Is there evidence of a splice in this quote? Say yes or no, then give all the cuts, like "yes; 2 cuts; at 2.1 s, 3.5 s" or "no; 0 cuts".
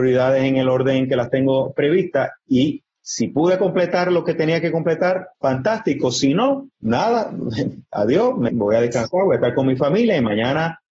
yes; 3 cuts; at 5.3 s, 6.7 s, 8.5 s